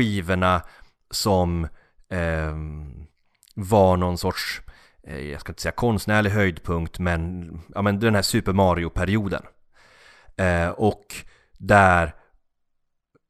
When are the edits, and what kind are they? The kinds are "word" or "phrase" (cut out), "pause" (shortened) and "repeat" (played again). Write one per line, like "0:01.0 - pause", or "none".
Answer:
none